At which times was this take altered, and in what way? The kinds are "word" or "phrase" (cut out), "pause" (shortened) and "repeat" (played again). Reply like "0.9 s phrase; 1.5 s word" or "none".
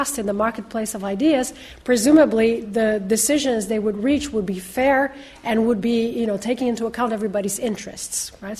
none